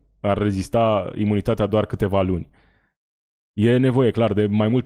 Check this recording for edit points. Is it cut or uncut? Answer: uncut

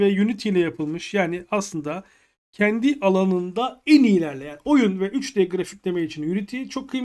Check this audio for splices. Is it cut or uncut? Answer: uncut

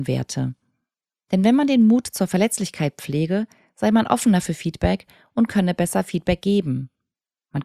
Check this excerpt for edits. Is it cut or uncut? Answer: uncut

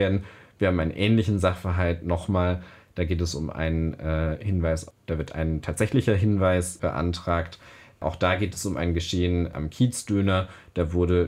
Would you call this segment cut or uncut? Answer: uncut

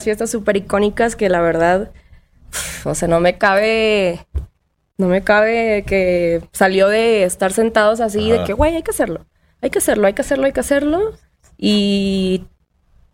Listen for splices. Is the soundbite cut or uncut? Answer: uncut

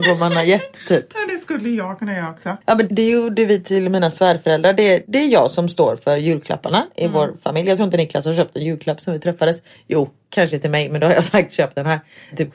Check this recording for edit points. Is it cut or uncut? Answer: cut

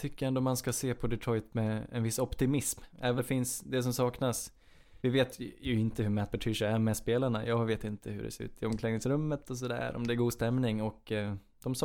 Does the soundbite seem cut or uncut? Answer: cut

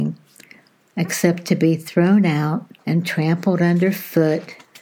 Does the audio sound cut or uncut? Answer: cut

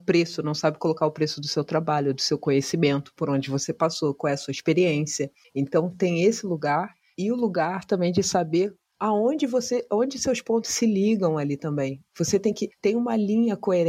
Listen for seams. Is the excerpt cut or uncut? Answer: uncut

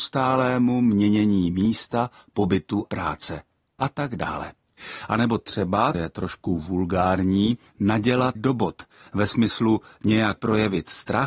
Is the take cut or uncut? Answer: cut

